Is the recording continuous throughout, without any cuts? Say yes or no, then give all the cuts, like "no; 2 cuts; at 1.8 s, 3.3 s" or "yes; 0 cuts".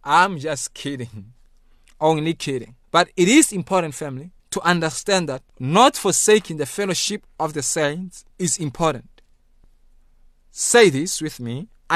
no; 4 cuts; at 2.8 s, 4.4 s, 5.5 s, 8.3 s